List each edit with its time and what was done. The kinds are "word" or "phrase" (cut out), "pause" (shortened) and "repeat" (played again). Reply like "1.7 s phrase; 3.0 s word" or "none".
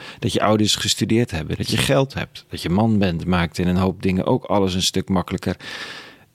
none